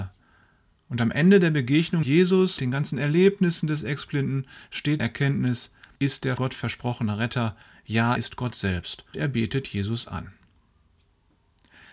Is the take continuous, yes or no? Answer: no